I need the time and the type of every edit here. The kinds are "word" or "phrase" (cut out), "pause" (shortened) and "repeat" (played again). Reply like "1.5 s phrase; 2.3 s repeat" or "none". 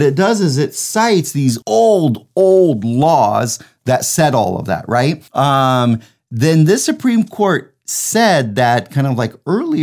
1.6 s pause; 5.3 s pause